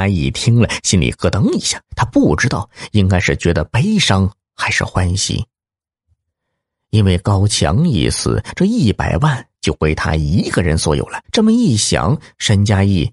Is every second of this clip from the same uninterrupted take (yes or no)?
no